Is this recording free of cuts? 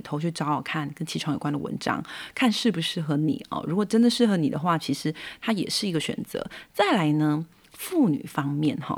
yes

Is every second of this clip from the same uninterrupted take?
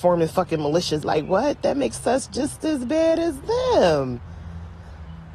no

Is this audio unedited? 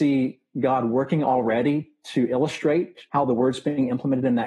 no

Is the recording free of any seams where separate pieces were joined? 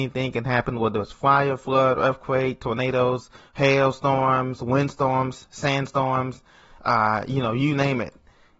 yes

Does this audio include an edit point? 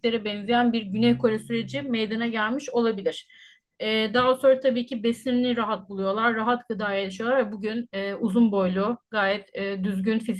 no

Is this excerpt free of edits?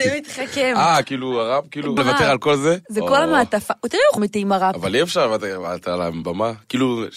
no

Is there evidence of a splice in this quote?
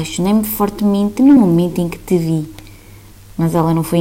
no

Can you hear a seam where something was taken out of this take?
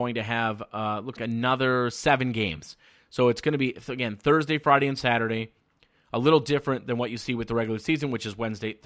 yes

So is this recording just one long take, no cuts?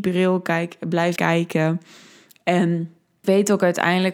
no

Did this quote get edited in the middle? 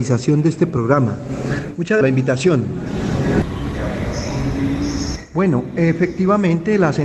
yes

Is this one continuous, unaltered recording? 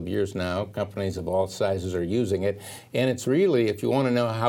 yes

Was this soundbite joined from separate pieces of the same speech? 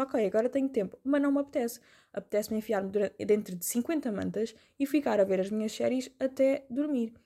no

